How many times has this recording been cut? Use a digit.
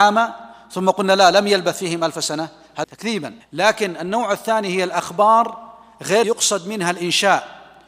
3